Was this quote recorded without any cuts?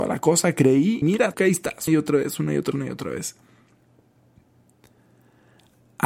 no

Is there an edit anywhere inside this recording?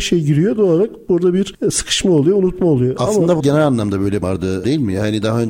yes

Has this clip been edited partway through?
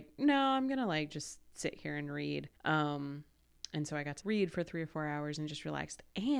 yes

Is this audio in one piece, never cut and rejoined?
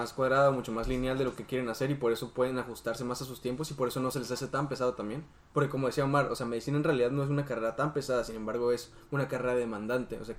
yes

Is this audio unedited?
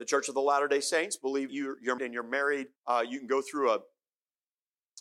no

